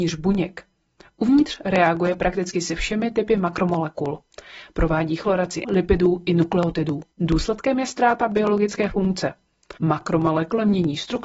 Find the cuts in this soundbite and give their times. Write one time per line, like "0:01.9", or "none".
0:05.6
0:07.1
0:09.8